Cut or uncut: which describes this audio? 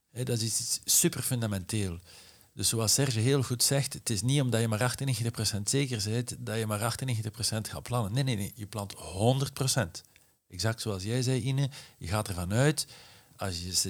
uncut